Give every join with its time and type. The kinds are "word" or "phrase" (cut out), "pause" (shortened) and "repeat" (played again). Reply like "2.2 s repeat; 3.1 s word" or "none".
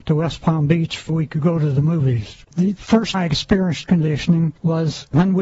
1.1 s word; 3.1 s word; 3.8 s word